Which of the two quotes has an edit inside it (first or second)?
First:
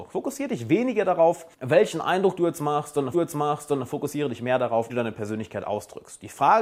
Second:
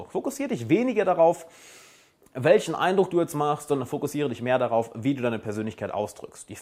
first